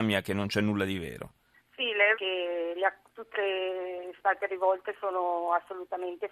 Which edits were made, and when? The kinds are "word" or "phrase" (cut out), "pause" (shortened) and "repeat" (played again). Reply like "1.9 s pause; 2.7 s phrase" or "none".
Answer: 1.5 s pause; 2.1 s phrase; 3.3 s phrase; 4.2 s word